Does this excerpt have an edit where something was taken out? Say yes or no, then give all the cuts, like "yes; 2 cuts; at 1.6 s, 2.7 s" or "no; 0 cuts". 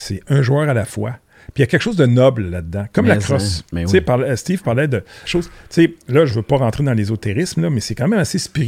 yes; 1 cut; at 5.3 s